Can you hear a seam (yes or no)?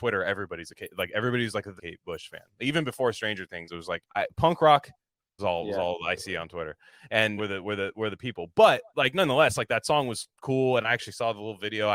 yes